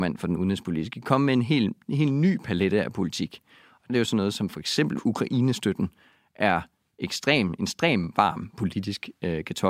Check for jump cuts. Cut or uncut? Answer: cut